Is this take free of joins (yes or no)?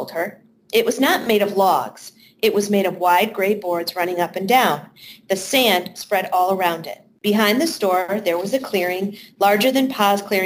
no